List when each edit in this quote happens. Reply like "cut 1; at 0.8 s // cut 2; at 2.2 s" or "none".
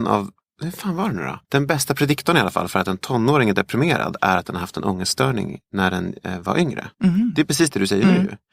cut 1; at 1.4 s // cut 2; at 6.9 s